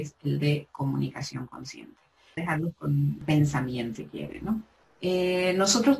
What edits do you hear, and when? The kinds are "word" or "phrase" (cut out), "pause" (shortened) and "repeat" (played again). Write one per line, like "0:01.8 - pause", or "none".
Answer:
0:02.4 - word
0:04.0 - word
0:04.8 - pause